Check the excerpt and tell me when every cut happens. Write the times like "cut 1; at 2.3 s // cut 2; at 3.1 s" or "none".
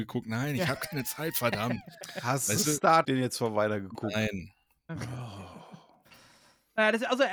cut 1; at 3.0 s